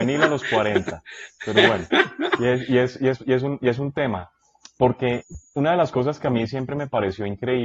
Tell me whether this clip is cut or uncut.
uncut